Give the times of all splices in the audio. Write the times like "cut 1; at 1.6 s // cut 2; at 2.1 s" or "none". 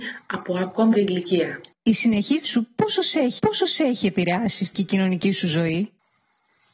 cut 1; at 0.9 s // cut 2; at 2.4 s // cut 3; at 3.4 s // cut 4; at 4.7 s